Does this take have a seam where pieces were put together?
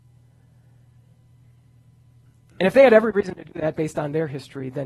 no; 0 cuts

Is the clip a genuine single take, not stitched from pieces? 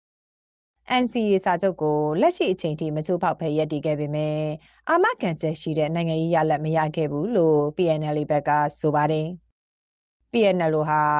yes; 0 cuts

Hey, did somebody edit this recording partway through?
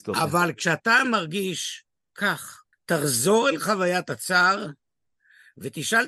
yes; 1 cut; at 2.7 s

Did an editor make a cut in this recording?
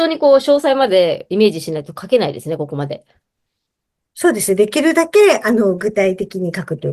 no; 0 cuts

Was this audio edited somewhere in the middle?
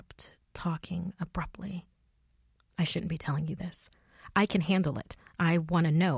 no; 0 cuts

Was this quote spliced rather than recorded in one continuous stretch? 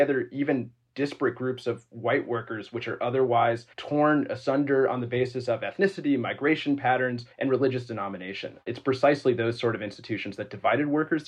yes; 2 cuts; at 3.7 s, 7.3 s

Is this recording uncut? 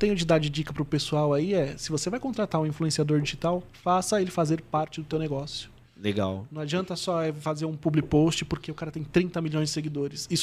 yes; 0 cuts

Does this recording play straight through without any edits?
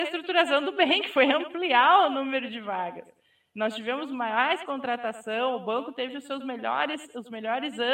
yes; 0 cuts

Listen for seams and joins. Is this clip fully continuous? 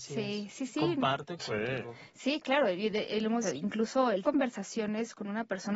no; 3 cuts; at 1.4 s, 3.4 s, 4.2 s

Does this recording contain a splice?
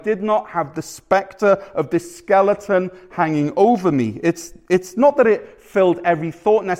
no; 0 cuts

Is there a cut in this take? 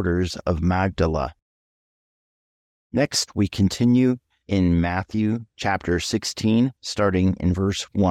no; 0 cuts

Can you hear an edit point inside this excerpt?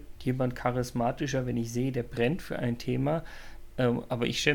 no; 0 cuts

